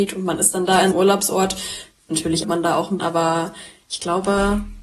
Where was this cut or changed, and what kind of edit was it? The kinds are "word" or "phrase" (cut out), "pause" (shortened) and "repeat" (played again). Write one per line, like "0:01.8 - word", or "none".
0:00.9 - word
0:02.4 - word
0:03.0 - word